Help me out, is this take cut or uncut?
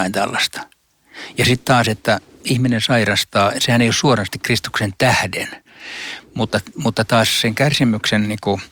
uncut